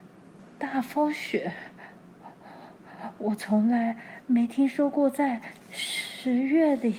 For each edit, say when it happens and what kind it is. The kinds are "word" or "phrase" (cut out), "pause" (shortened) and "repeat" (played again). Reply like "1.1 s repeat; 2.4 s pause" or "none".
5.6 s pause